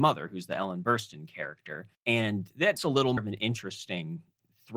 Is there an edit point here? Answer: yes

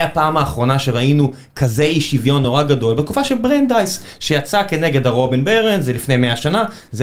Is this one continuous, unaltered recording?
yes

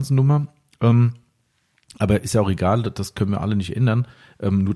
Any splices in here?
no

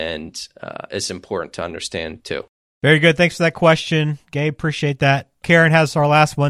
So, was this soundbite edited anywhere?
no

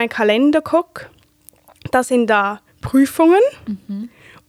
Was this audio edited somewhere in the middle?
yes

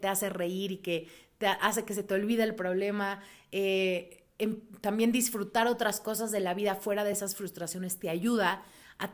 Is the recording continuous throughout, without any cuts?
yes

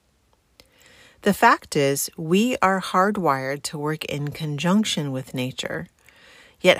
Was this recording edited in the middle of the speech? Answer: no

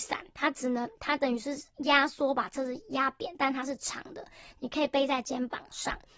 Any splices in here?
no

